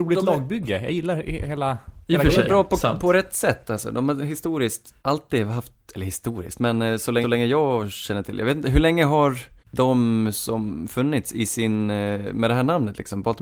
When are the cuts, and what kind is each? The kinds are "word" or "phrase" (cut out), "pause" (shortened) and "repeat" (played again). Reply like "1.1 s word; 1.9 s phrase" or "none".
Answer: 5.0 s pause; 7.2 s repeat; 9.6 s pause